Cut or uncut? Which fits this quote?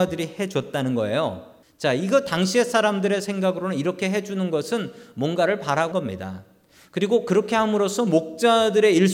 cut